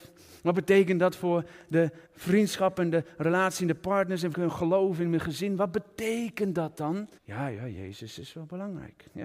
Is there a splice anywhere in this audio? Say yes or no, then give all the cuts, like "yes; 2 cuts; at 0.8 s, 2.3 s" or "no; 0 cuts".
yes; 3 cuts; at 2.1 s, 4.3 s, 7.2 s